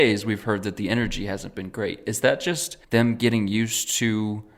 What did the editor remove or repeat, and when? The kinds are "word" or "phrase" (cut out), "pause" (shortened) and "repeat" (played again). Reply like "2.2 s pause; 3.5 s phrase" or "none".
2.8 s pause